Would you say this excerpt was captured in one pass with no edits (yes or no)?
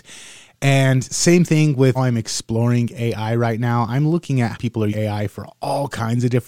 no